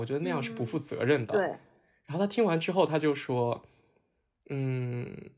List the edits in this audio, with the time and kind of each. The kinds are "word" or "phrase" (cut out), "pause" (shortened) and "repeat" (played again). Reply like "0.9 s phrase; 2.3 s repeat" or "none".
none